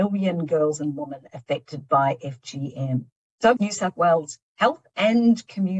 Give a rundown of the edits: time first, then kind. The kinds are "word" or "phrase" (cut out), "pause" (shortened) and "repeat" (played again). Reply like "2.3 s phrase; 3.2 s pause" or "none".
3.6 s phrase